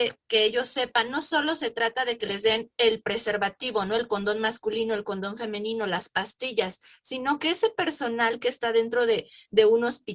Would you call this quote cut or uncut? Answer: uncut